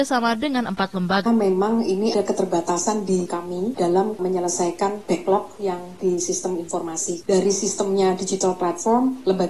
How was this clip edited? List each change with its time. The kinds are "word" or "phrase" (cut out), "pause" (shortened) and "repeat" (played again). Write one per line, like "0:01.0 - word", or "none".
0:01.3 - phrase
0:02.1 - word
0:03.3 - word